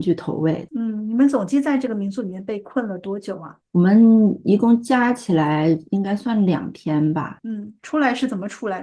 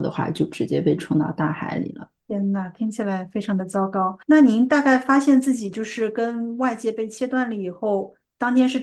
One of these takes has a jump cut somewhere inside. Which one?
second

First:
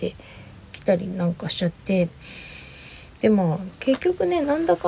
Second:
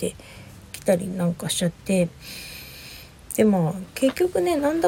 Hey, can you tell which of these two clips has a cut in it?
first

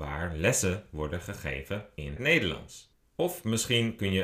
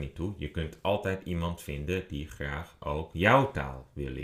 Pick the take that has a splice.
first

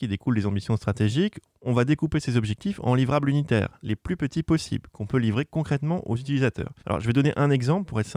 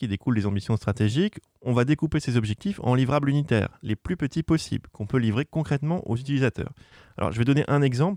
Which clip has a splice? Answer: first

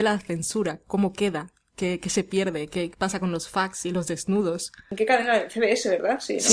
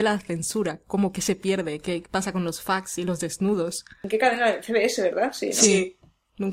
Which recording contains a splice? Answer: second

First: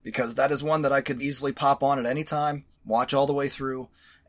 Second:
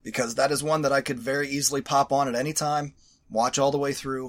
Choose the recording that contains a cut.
first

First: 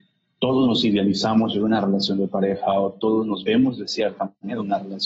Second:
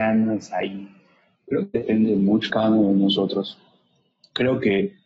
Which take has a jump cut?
second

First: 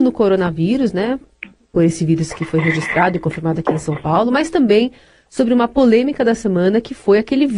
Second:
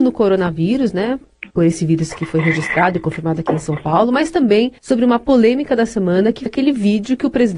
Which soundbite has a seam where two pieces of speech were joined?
second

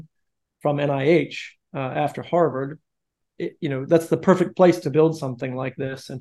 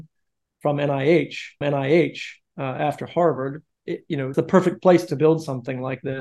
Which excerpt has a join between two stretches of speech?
second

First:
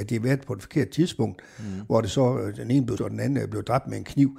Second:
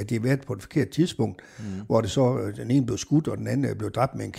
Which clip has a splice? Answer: first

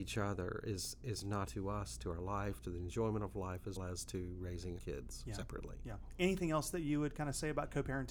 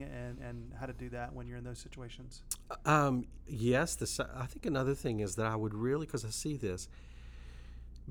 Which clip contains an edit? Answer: first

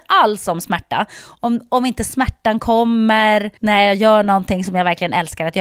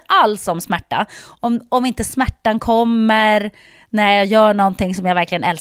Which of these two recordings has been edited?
first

